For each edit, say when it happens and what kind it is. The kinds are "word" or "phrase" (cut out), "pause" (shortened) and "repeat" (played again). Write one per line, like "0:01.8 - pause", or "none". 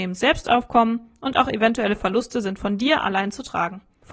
none